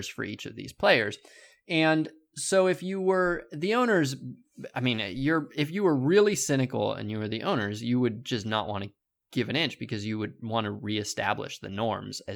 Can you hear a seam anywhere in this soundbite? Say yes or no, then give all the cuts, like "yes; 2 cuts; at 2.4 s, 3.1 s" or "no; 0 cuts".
no; 0 cuts